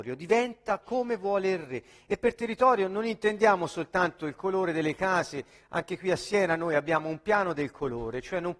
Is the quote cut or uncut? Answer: uncut